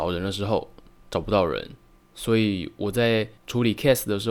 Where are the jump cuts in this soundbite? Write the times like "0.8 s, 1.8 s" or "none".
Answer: none